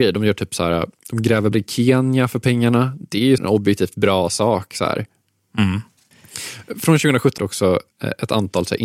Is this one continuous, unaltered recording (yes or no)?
no